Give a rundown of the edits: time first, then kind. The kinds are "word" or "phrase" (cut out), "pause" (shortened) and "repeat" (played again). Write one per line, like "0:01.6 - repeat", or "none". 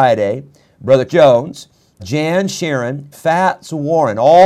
0:01.1 - word
0:02.0 - word
0:03.1 - word